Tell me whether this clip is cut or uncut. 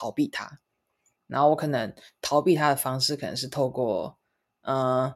uncut